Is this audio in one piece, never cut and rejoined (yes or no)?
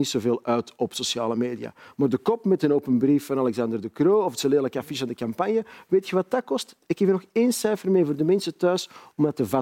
yes